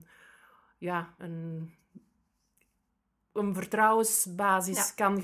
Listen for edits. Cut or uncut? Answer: cut